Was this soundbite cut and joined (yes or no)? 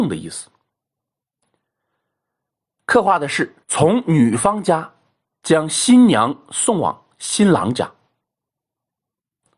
yes